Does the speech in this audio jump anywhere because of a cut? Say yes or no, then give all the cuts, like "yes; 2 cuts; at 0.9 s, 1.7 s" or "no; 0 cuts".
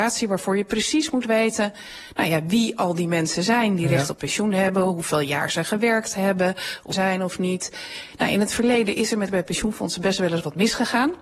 yes; 2 cuts; at 6.9 s, 9.3 s